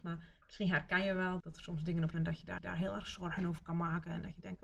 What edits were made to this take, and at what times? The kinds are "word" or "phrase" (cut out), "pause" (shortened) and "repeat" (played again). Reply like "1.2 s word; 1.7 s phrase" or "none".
1.4 s word; 2.1 s phrase; 2.6 s repeat